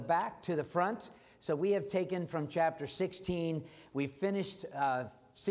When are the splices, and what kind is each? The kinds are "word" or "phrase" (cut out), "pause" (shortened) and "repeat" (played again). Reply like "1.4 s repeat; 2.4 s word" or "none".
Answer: none